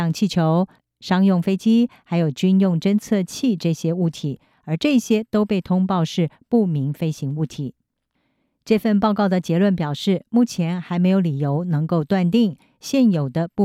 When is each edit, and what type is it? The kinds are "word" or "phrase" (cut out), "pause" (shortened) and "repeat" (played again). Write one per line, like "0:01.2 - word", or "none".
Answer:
none